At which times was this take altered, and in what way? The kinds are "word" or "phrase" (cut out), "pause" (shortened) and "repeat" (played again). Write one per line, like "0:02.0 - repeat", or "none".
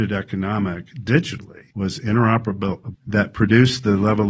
0:01.7 - pause
0:02.9 - phrase